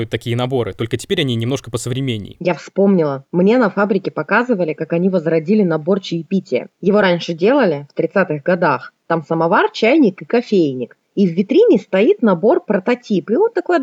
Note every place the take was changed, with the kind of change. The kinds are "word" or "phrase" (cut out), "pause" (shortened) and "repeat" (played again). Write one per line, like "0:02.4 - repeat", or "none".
0:06.7 - pause
0:11.0 - pause